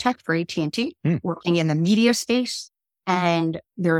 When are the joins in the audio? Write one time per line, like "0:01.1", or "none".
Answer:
none